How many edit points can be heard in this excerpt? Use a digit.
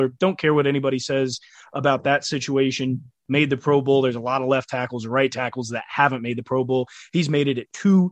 0